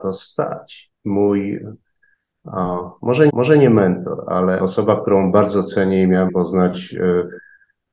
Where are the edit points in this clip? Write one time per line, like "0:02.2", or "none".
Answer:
0:01.0
0:03.3
0:04.6
0:06.3